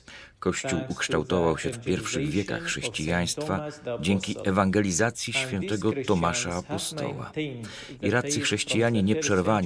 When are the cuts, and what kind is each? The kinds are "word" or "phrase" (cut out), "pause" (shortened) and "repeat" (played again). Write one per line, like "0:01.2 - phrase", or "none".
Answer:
0:01.7 - word